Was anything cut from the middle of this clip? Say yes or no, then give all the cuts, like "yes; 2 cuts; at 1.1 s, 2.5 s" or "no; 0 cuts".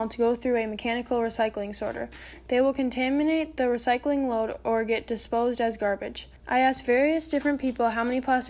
yes; 1 cut; at 6.4 s